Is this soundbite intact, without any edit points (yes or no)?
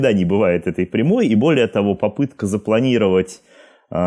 yes